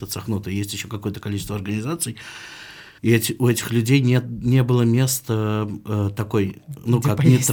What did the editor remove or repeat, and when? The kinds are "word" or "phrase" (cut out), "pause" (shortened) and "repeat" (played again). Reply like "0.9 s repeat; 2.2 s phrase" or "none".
3.0 s pause